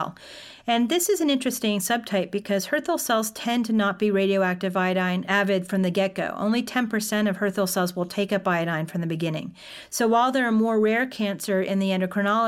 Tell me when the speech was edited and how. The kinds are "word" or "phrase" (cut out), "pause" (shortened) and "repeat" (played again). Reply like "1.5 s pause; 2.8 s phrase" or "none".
none